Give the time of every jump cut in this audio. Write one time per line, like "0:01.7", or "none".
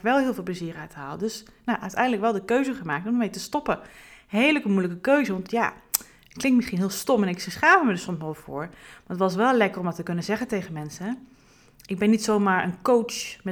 none